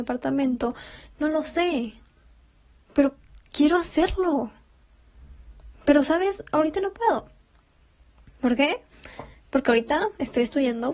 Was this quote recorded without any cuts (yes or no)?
yes